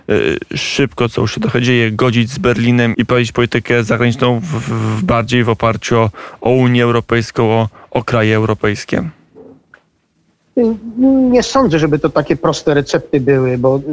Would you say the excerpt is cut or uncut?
cut